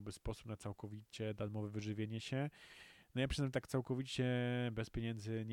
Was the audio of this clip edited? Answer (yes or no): no